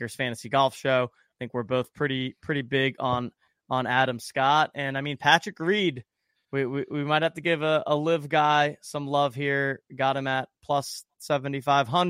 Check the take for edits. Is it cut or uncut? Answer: uncut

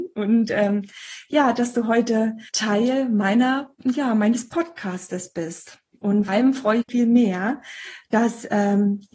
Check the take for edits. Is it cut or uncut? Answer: cut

